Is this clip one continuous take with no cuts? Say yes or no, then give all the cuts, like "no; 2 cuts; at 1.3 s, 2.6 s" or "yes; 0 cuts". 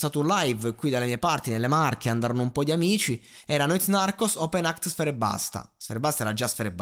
yes; 0 cuts